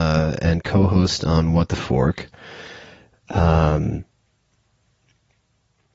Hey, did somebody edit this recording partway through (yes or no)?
no